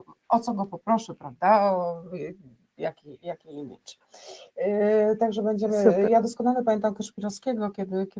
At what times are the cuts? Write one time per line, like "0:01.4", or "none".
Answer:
none